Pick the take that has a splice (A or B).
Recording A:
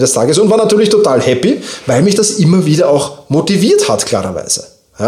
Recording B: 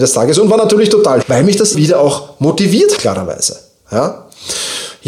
B